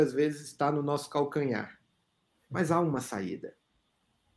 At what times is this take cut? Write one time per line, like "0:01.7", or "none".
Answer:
none